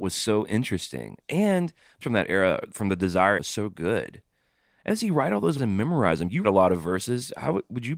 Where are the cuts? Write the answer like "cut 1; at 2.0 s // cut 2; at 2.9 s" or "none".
cut 1; at 2.0 s // cut 2; at 3.4 s // cut 3; at 4.9 s // cut 4; at 5.6 s // cut 5; at 6.4 s